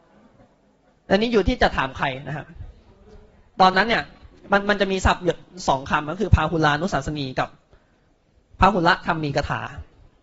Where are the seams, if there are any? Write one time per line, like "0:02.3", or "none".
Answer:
none